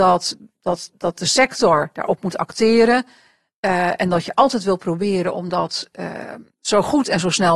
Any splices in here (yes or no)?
no